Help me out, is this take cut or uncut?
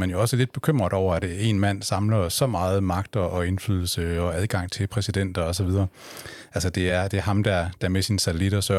uncut